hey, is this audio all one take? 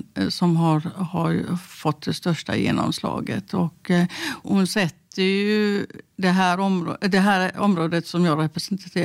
no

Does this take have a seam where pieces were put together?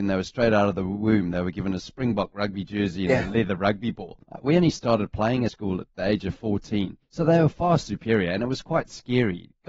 yes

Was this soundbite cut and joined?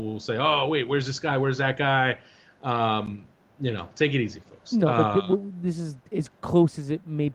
yes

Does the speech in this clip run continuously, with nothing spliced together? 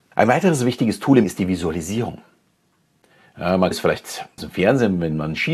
no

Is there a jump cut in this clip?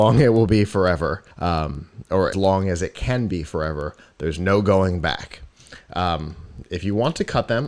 yes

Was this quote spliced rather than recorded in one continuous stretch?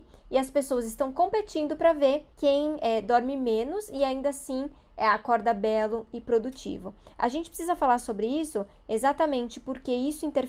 yes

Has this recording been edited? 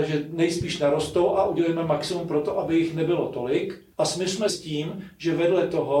yes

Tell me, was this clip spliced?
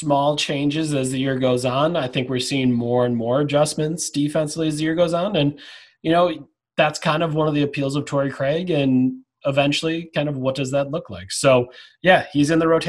no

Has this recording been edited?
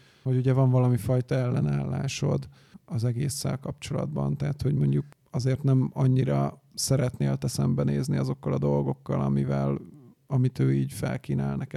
no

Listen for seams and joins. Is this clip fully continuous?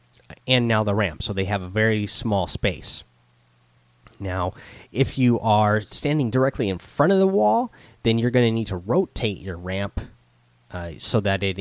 yes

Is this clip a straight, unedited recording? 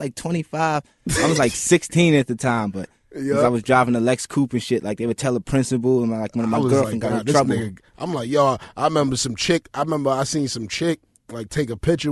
yes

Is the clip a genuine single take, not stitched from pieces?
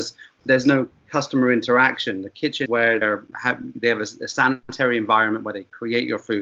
no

